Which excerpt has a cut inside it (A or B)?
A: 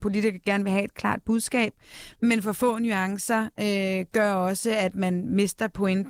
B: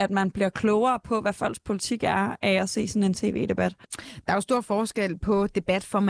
B